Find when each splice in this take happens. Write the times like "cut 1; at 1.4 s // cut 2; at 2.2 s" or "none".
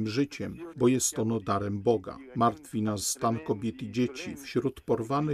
cut 1; at 3.0 s